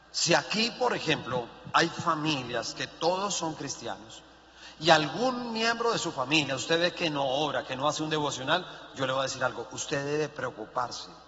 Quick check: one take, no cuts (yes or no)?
yes